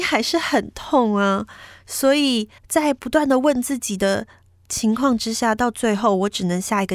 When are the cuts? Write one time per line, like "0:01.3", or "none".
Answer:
0:02.6

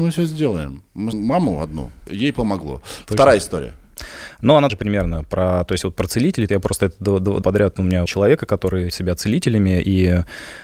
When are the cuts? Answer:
0:01.1
0:02.1
0:04.7
0:06.5
0:07.4
0:08.1
0:08.9

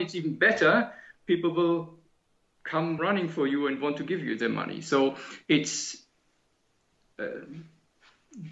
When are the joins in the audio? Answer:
none

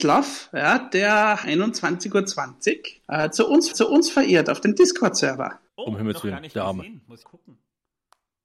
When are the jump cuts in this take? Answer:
0:01.4
0:03.0
0:03.7
0:05.7
0:07.2

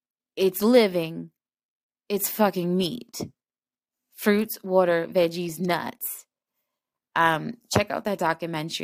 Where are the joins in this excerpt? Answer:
none

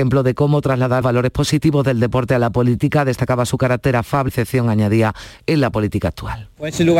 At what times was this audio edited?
0:01.0
0:04.3

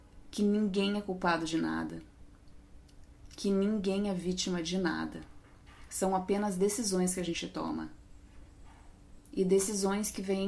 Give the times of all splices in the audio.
none

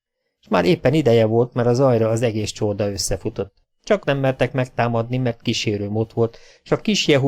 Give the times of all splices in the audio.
0:04.0

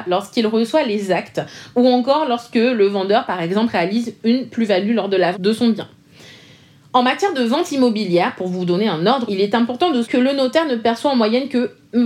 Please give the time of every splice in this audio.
0:05.3
0:09.3
0:10.0

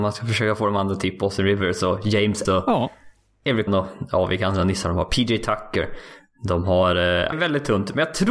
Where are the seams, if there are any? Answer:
0:02.4
0:03.7
0:07.3

